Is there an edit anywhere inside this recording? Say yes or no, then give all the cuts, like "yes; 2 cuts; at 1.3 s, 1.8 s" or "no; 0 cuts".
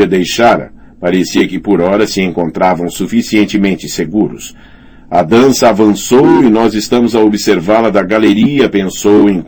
no; 0 cuts